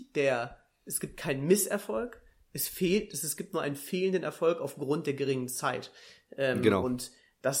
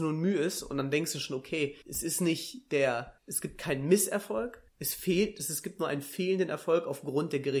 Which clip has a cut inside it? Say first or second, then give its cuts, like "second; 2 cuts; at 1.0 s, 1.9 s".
second; 3 cuts; at 1.8 s, 3.2 s, 4.7 s